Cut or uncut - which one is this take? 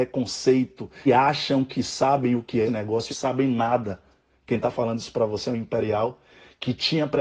cut